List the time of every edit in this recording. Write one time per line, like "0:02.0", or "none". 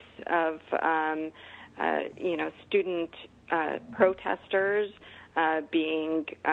none

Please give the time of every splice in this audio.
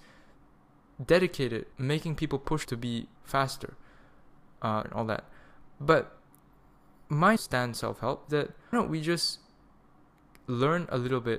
0:01.7
0:02.6
0:03.2
0:04.8
0:07.4
0:07.7
0:08.3
0:08.7

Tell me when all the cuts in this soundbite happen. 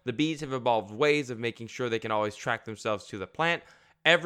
none

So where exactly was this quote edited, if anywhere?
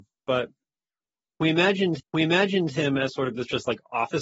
0:02.0

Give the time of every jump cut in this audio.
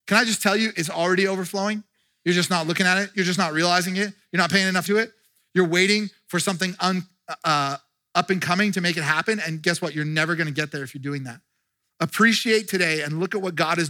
0:04.9

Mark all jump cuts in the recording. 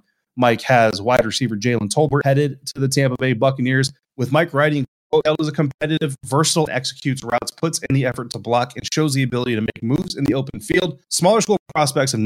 0:05.2
0:06.7
0:11.0

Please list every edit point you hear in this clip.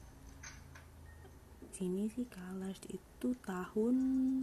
0:01.7

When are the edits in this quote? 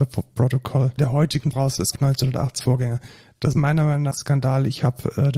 0:01.0
0:01.5
0:01.9
0:02.6
0:03.5
0:04.1

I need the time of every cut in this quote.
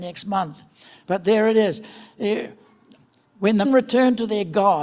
0:03.6

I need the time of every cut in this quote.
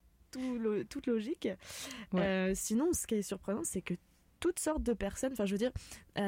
none

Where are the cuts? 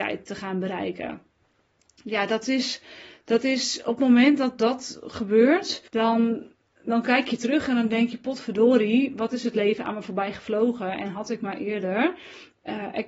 0:05.9

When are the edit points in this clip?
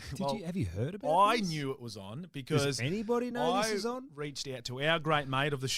none

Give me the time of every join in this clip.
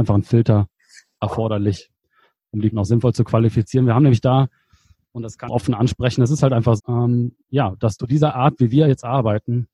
0:02.7
0:05.5
0:06.8
0:07.4
0:08.0

